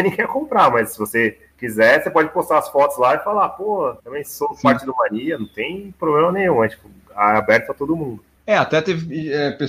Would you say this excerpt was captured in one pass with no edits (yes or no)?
no